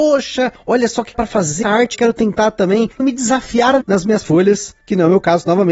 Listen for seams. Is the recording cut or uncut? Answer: cut